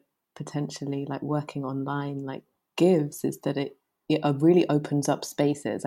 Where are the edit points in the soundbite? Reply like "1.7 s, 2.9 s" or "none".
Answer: none